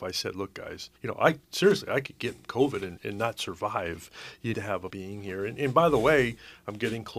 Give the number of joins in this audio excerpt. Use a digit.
5